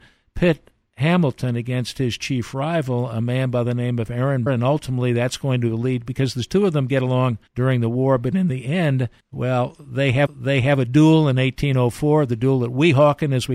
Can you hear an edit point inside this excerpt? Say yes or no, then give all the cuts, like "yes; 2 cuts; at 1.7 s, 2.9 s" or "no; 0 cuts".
yes; 4 cuts; at 4.5 s, 7.5 s, 9.2 s, 10.3 s